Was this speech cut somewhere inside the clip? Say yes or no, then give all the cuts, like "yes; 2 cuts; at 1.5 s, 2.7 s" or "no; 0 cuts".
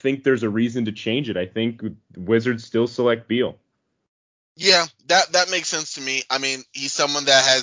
no; 0 cuts